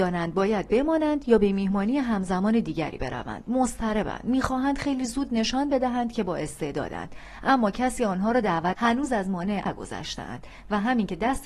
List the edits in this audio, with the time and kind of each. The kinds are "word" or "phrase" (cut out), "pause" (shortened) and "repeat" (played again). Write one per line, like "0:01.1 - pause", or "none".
0:08.7 - word
0:09.7 - word